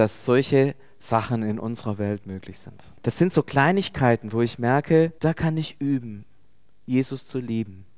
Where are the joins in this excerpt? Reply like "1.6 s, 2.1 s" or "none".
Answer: 3.0 s, 5.2 s